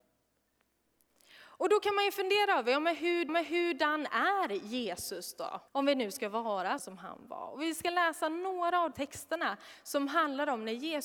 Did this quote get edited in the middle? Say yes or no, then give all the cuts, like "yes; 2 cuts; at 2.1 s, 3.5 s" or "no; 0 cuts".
yes; 4 cuts; at 3.3 s, 5.7 s, 6.8 s, 8.9 s